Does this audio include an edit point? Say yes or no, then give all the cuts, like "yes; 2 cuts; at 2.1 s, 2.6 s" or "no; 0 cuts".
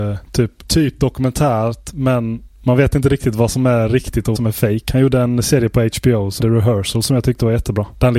yes; 2 cuts; at 4.4 s, 6.4 s